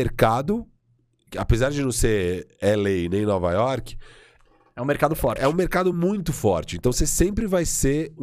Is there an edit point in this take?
no; 0 cuts

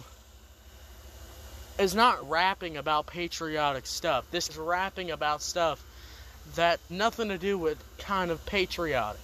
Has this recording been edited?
yes; 4 cuts; at 2.2 s, 4.5 s, 6.9 s, 8.0 s

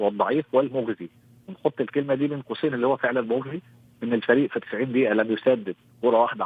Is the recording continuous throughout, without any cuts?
yes; 0 cuts

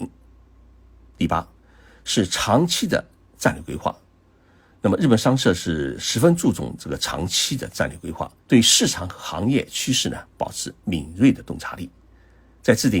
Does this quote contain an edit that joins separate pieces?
yes; 1 cut; at 8.4 s

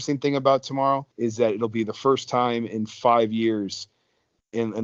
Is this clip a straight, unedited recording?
no; 1 cut; at 1.1 s

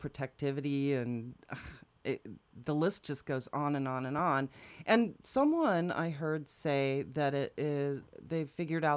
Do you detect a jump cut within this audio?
no; 0 cuts

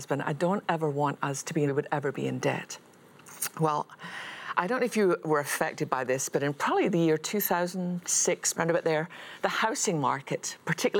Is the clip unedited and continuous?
no; 2 cuts; at 1.7 s, 8.5 s

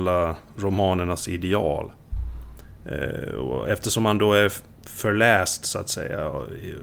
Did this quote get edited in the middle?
no; 0 cuts

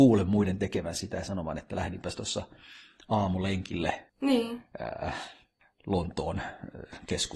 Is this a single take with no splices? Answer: no; 1 cut; at 4.1 s

